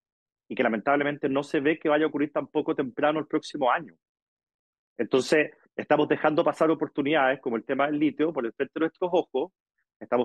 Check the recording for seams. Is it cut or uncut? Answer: uncut